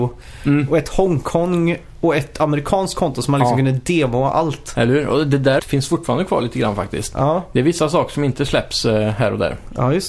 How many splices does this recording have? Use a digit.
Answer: 1